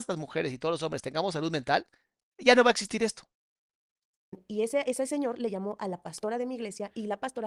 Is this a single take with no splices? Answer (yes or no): yes